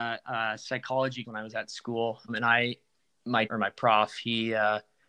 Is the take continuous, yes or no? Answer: no